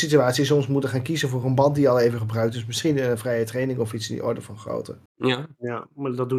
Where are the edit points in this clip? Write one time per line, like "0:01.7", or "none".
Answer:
none